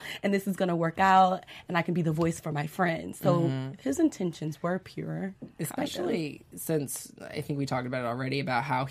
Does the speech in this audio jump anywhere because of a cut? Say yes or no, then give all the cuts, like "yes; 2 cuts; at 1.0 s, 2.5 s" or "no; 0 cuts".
no; 0 cuts